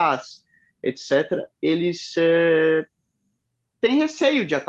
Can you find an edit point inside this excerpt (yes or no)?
no